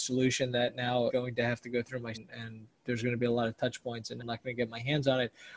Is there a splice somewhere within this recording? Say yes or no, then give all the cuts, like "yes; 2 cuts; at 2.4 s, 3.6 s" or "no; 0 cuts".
yes; 3 cuts; at 1.1 s, 2.1 s, 4.2 s